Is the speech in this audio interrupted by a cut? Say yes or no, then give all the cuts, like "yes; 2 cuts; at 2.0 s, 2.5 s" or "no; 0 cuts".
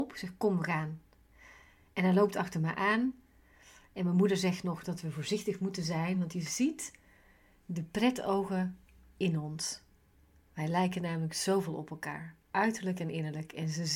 no; 0 cuts